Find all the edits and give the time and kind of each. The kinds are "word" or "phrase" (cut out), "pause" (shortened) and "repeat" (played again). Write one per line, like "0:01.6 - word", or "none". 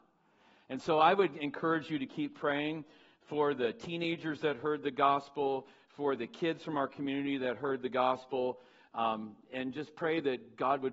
none